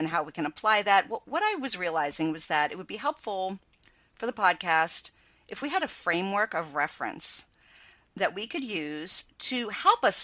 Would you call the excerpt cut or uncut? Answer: uncut